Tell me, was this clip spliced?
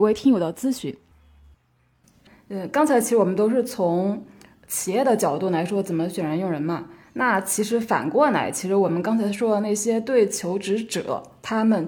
no; 0 cuts

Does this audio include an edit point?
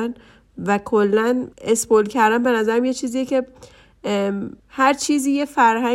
yes; 2 cuts; at 1.5 s, 4.6 s

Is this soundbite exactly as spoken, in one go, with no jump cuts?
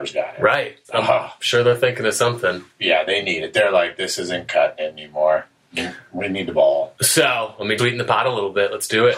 no; 1 cut; at 7.8 s

